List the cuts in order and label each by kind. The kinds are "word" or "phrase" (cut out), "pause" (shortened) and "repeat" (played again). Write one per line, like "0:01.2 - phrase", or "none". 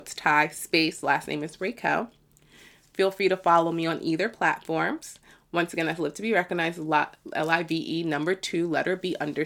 none